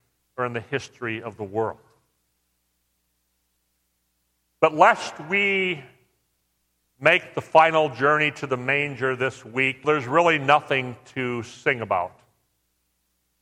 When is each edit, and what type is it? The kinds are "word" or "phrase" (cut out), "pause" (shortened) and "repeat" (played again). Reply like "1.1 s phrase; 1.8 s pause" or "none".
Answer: 9.8 s phrase